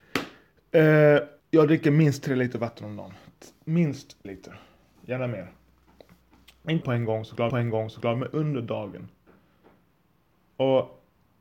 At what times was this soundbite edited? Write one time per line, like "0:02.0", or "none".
0:01.4
0:04.2
0:06.8
0:07.5

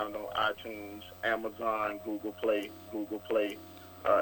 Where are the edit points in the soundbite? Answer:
0:02.9

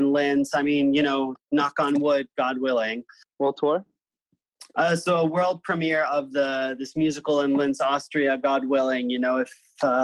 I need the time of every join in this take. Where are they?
none

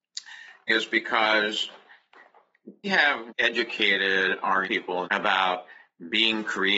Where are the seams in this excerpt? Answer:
0:02.8
0:03.3
0:04.6
0:05.0

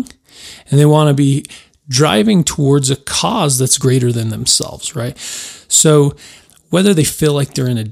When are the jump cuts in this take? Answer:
none

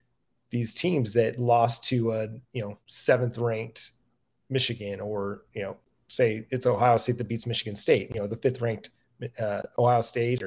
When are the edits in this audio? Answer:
0:02.4

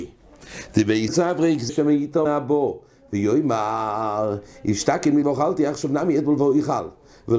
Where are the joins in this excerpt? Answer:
0:01.1
0:01.7
0:02.3
0:05.2

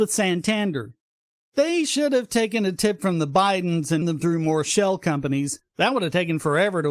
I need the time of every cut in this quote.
0:04.0

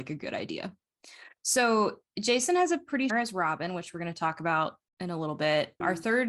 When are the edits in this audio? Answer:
0:03.1

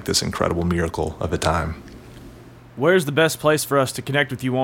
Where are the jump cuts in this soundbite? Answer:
none

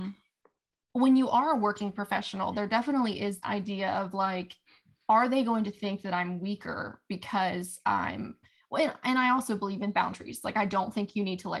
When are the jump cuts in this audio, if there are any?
0:03.4

